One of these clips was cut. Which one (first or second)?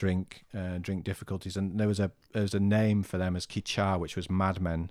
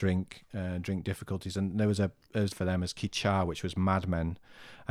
second